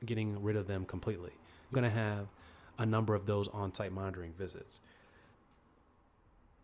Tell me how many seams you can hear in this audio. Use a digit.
1